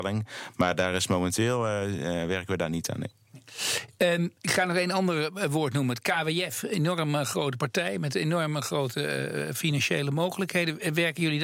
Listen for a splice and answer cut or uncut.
cut